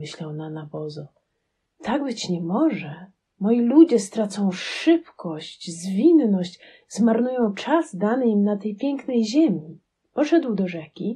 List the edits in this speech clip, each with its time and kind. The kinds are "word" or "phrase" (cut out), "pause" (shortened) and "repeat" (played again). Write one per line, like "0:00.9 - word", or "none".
none